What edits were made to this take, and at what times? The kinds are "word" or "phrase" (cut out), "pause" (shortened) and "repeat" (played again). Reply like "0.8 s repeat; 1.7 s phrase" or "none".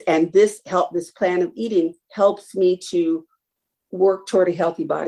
2.0 s pause

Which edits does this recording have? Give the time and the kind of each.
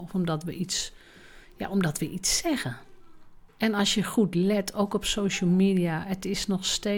3.5 s pause

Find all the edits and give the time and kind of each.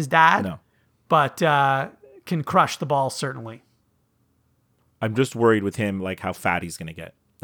none

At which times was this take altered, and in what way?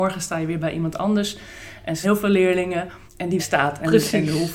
2.0 s word; 3.1 s pause; 3.4 s phrase

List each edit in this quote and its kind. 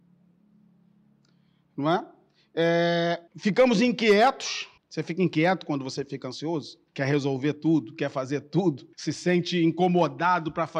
3.3 s pause; 4.8 s pause; 6.9 s pause; 8.9 s pause

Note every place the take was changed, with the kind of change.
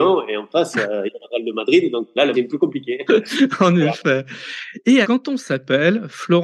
2.3 s word; 5.0 s word

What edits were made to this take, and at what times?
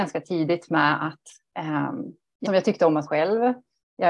2.5 s word; 3.1 s word

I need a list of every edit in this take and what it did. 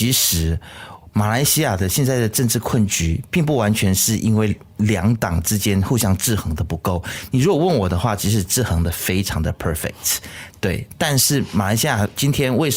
none

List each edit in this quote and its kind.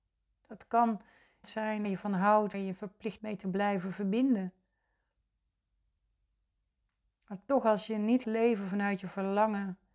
1.4 s word; 1.8 s word; 2.5 s word; 3.2 s word; 8.2 s word

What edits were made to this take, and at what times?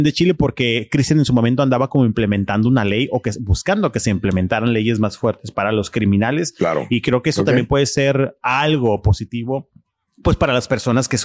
none

